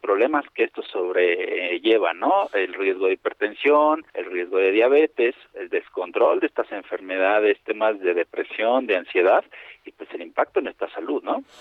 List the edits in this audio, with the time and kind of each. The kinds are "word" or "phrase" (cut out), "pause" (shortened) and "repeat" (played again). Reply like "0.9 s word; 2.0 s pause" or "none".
4.1 s pause